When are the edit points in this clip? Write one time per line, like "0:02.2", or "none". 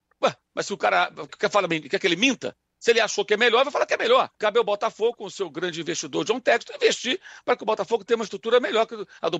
0:01.3
0:04.3

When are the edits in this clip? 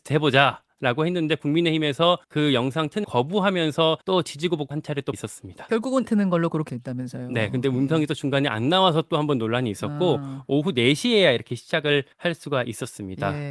0:02.2
0:03.0
0:04.0
0:04.7
0:05.1
0:06.1
0:06.7
0:12.1

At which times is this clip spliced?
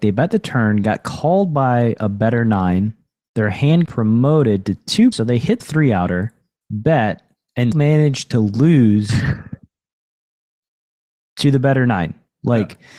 0:03.8
0:05.1
0:05.6
0:07.7

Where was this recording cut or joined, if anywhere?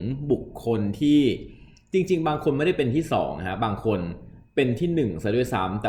none

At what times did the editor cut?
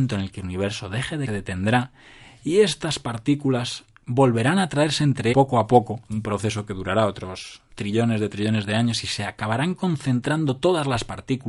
0:01.3
0:05.3
0:06.0
0:07.7

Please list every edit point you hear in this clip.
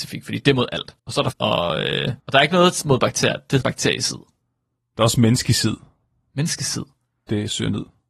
0:01.0
0:01.3
0:02.2
0:03.6

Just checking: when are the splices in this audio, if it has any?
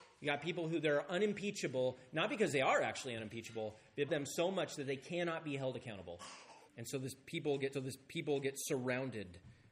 0:04.1
0:06.7
0:07.7

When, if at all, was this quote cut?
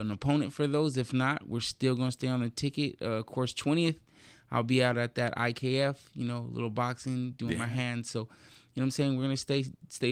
none

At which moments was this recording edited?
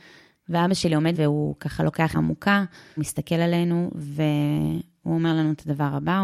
0:01.1
0:02.1
0:03.0

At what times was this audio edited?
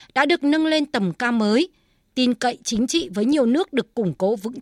none

